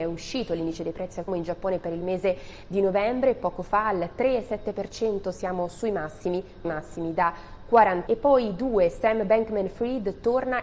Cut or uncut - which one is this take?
cut